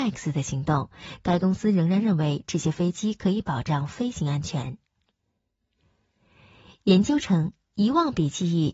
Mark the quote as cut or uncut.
uncut